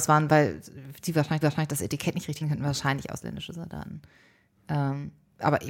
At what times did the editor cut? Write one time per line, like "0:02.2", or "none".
0:01.4
0:02.4

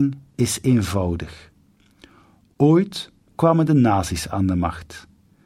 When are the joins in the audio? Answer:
none

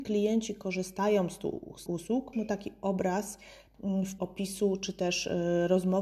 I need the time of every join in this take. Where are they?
0:01.9
0:02.3
0:04.2

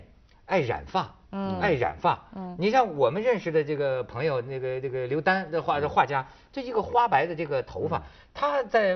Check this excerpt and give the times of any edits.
0:01.3

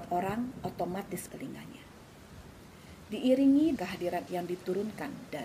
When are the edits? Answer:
0:01.3
0:03.8
0:04.3

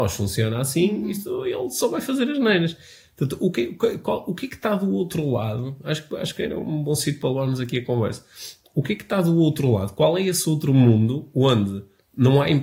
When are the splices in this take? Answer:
none

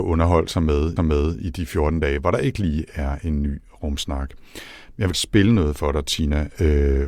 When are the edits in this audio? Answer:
0:01.0
0:05.1

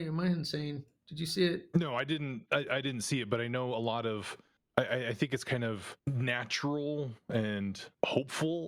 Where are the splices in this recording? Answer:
none

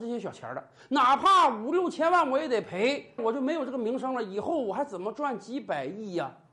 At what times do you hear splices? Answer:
0:03.2

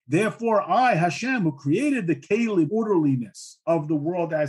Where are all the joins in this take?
0:02.7

